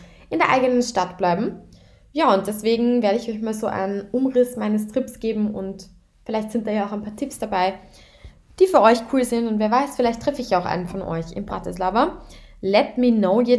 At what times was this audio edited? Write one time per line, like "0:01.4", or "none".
none

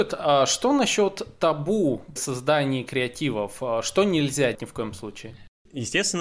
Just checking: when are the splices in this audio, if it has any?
0:02.2
0:04.5

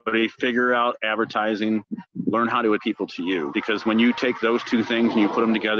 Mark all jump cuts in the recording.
0:02.8

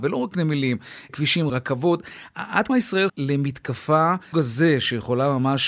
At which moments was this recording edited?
0:01.1
0:01.5
0:02.7
0:03.1
0:04.3

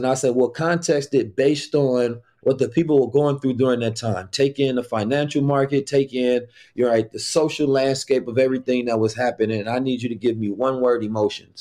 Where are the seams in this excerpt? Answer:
none

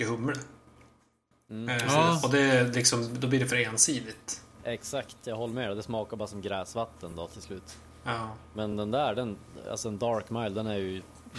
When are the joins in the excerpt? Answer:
none

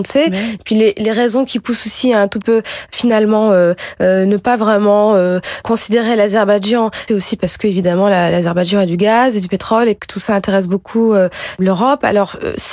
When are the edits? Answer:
0:02.4
0:07.1

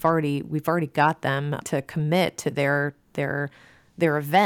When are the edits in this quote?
0:01.6

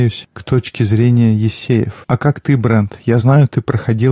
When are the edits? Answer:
none

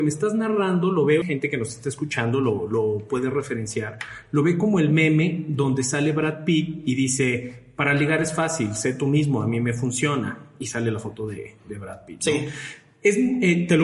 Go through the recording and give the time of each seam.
0:01.2

